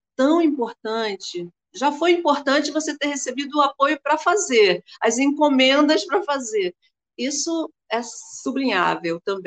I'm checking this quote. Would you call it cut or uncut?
uncut